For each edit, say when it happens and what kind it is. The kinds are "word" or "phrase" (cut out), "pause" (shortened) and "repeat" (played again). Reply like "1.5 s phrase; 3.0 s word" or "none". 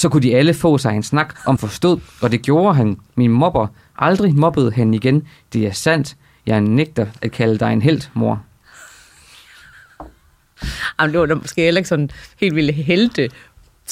1.6 s word